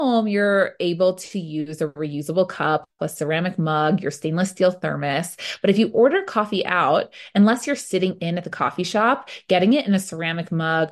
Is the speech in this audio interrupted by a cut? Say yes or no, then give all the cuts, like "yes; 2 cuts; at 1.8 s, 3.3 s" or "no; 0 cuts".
no; 0 cuts